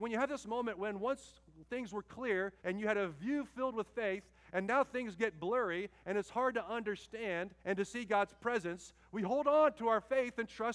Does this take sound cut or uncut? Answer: cut